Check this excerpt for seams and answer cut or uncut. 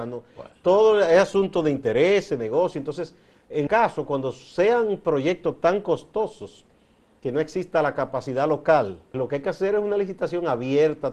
cut